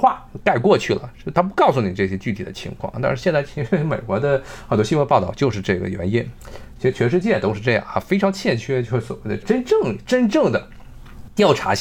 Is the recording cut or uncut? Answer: uncut